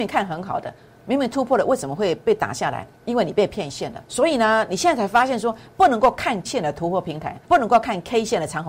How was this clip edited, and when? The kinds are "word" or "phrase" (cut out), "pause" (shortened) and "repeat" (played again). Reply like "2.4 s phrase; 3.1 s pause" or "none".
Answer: 2.9 s pause; 4.1 s pause; 6.5 s word; 7.4 s pause